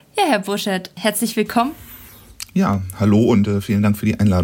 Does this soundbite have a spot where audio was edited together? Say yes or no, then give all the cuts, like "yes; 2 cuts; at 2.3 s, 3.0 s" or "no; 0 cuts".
no; 0 cuts